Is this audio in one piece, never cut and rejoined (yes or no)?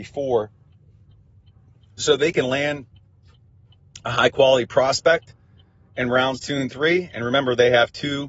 yes